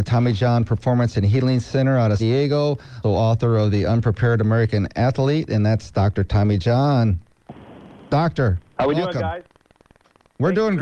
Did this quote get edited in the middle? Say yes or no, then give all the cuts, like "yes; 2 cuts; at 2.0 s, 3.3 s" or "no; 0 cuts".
yes; 2 cuts; at 2.2 s, 3.0 s